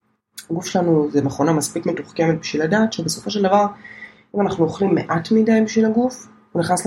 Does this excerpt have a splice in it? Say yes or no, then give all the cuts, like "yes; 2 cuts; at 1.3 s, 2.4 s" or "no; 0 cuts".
no; 0 cuts